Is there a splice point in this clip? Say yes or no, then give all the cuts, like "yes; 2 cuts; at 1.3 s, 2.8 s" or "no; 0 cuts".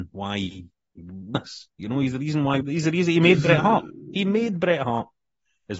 yes; 2 cuts; at 1.3 s, 2.6 s